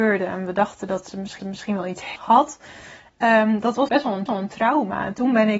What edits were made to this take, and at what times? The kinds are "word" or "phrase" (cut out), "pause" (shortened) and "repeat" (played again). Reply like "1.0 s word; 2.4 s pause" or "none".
1.4 s repeat; 2.2 s phrase; 3.9 s word; 4.3 s repeat

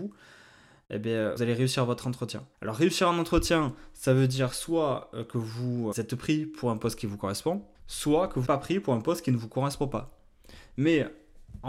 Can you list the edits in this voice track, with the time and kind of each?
1.4 s word; 2.5 s pause; 5.9 s word; 7.7 s pause; 8.4 s word

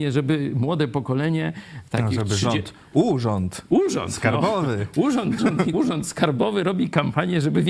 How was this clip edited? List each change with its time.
5.4 s word; 5.7 s word

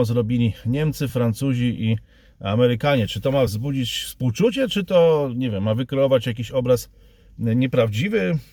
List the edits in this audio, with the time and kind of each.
none

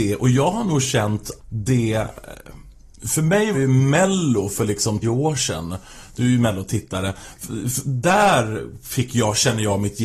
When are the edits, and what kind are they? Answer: 1.4 s word; 3.5 s word; 5.0 s word

